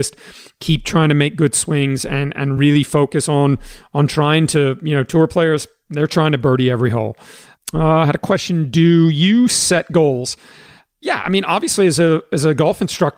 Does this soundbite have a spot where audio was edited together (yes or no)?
no